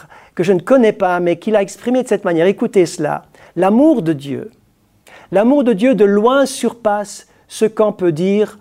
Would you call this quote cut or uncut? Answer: uncut